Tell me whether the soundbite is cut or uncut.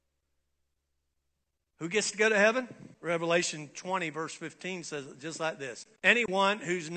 cut